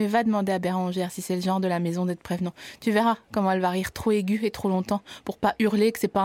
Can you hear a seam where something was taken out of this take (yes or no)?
no